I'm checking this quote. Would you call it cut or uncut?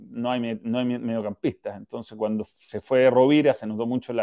cut